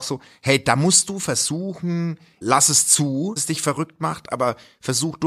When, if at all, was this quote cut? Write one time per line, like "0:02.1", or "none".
0:02.4
0:03.4